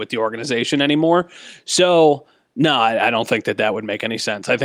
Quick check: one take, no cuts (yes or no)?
yes